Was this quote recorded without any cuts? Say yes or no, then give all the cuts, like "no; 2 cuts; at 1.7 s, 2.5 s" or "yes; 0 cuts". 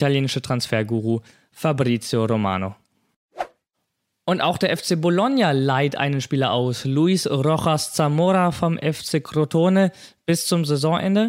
yes; 0 cuts